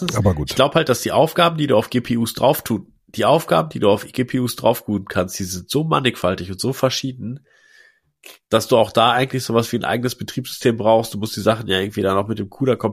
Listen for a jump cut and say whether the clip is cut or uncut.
uncut